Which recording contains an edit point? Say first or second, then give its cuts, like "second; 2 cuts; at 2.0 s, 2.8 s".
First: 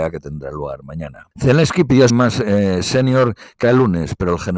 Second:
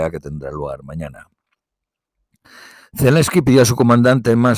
first; 3 cuts; at 1.3 s, 2.1 s, 3.6 s